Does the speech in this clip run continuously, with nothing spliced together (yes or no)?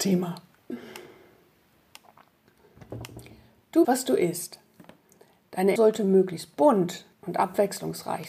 no